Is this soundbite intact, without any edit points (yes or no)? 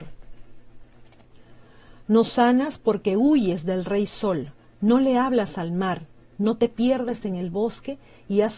yes